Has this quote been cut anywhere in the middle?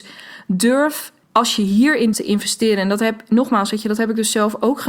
yes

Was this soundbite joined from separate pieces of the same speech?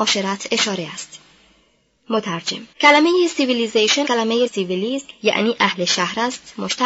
yes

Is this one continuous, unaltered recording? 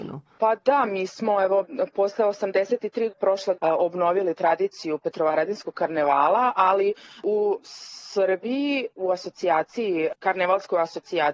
no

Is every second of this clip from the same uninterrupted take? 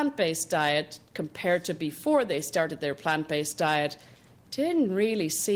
yes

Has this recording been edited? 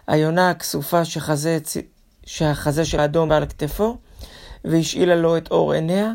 yes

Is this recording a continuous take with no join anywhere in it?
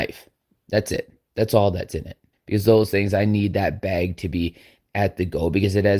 no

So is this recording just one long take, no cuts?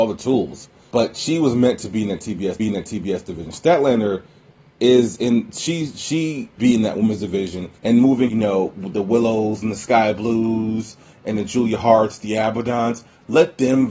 no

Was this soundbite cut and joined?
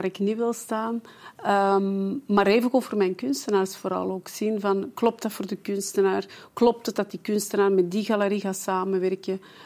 no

